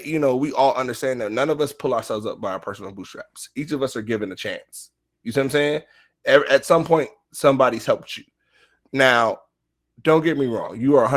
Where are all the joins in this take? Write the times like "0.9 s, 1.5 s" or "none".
none